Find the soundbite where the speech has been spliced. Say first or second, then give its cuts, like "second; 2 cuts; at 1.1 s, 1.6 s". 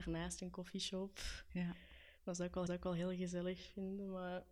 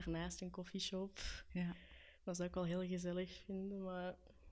first; 1 cut; at 2.7 s